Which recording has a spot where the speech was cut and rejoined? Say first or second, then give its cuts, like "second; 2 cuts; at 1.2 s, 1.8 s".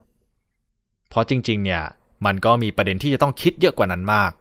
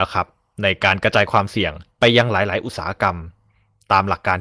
second; 1 cut; at 1.9 s